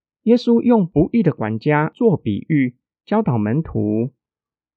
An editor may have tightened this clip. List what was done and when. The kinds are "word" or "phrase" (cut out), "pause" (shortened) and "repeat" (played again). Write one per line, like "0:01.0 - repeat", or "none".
none